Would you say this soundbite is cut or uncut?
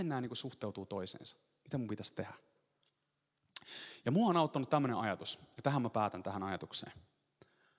uncut